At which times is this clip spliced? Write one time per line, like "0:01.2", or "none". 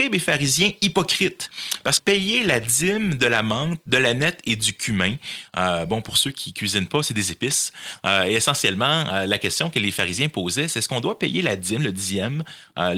0:02.0